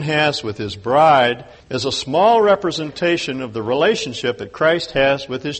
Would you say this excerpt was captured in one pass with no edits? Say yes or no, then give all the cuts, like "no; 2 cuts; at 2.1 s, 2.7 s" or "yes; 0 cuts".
no; 1 cut; at 1.6 s